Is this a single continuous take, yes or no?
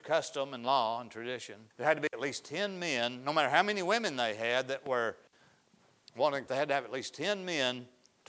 no